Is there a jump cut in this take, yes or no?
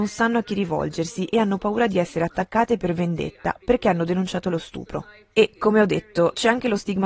no